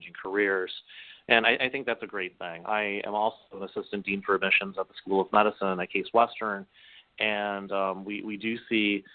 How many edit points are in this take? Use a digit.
0